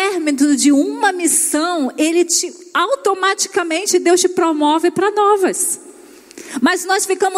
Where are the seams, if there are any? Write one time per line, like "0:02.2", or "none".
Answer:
none